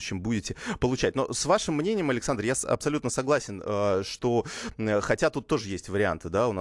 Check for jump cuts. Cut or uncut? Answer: uncut